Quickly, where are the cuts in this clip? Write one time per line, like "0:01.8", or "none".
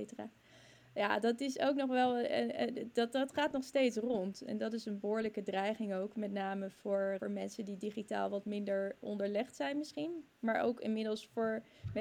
0:07.2